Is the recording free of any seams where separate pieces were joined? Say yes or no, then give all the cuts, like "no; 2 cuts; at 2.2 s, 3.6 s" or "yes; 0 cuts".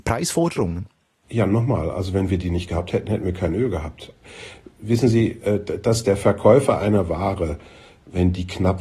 yes; 0 cuts